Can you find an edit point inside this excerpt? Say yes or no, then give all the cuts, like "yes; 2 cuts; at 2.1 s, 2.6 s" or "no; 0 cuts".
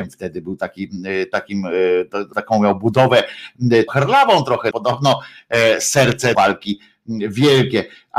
yes; 4 cuts; at 2.3 s, 3.9 s, 4.7 s, 6.3 s